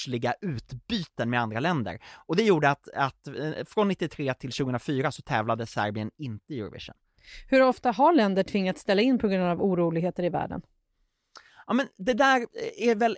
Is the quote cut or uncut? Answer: uncut